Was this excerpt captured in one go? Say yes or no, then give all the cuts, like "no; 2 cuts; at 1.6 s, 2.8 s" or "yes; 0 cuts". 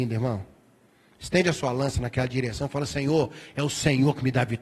yes; 0 cuts